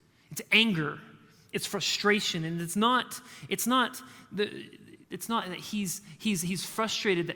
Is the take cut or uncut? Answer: cut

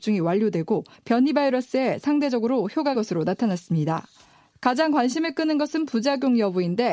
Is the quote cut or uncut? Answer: cut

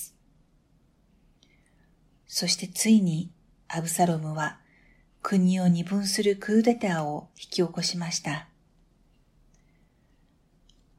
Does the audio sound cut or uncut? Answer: uncut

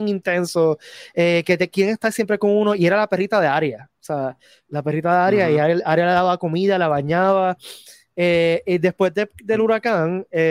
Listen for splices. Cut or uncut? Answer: uncut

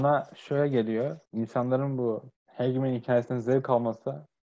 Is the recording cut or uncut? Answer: cut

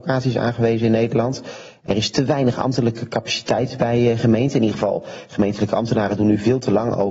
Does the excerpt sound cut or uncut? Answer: uncut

